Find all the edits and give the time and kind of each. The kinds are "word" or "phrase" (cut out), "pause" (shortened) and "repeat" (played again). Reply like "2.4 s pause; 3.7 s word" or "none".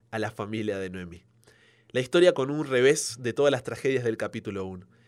2.3 s word